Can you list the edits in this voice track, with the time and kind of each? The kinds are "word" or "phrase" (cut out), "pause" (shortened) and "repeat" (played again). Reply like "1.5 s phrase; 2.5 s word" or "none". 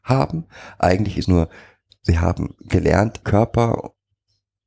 1.2 s word; 3.2 s phrase